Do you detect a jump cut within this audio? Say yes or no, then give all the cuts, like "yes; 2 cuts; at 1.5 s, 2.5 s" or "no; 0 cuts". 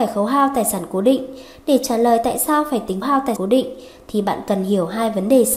yes; 2 cuts; at 3.0 s, 3.4 s